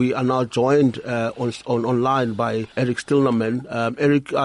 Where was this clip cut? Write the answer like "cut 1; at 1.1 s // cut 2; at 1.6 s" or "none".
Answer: cut 1; at 2.7 s